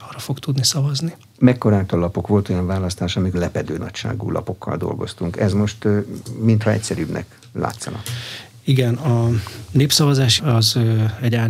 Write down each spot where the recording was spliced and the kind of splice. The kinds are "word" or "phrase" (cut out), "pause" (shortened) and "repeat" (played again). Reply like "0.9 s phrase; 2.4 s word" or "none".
1.9 s word; 3.3 s word; 10.4 s word